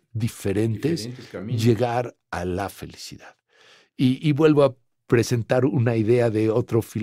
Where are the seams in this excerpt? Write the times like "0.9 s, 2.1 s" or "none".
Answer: none